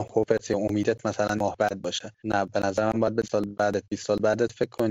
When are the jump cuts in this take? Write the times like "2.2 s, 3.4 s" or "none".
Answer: 1.4 s, 2.2 s, 3.2 s